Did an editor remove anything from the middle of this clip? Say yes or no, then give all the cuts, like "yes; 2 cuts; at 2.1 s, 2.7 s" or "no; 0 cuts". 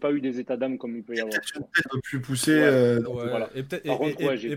yes; 1 cut; at 1.9 s